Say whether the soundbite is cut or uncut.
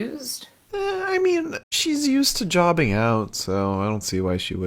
cut